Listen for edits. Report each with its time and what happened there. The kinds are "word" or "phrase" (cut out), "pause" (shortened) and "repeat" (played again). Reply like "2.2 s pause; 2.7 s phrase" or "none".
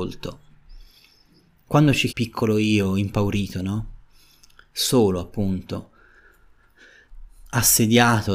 2.1 s phrase